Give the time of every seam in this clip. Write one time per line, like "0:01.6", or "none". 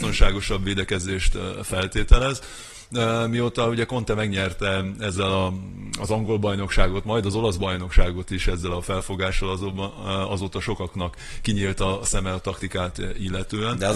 none